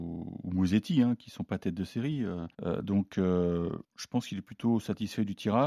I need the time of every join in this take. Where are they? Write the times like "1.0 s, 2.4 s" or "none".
2.5 s, 3.8 s